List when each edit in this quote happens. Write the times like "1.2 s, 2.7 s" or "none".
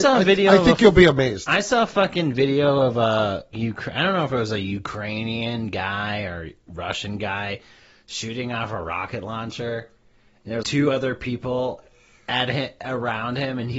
3.5 s, 10.6 s